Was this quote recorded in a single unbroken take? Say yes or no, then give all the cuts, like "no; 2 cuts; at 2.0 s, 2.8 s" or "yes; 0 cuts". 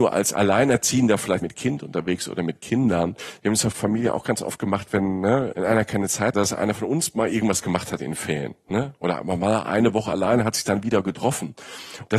no; 4 cuts; at 1.4 s, 3.7 s, 5.5 s, 6.3 s